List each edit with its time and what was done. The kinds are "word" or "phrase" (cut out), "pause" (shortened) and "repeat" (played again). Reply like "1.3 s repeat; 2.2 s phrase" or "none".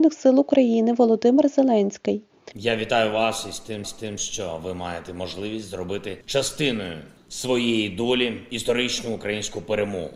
3.8 s repeat; 6.2 s pause